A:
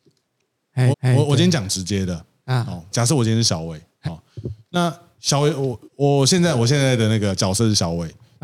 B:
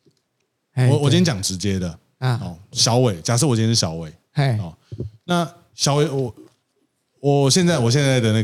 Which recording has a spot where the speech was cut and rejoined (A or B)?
A